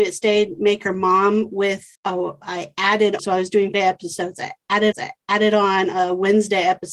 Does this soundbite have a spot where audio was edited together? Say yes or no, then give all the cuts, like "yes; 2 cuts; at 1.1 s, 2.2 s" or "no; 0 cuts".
yes; 4 cuts; at 1.9 s, 3.2 s, 3.7 s, 4.9 s